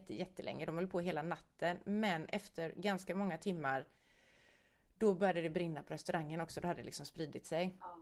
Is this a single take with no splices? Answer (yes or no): yes